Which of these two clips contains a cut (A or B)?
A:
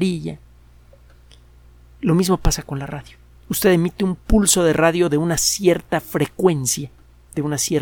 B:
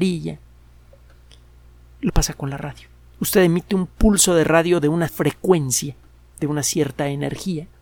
B